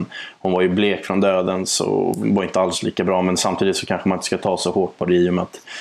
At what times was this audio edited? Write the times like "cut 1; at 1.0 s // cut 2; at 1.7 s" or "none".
none